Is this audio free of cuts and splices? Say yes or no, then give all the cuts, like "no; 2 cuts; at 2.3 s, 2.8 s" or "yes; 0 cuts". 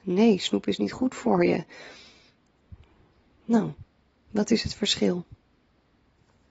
yes; 0 cuts